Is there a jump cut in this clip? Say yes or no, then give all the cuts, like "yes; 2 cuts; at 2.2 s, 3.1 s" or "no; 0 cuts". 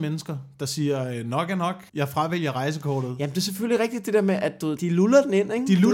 yes; 2 cuts; at 1.9 s, 4.8 s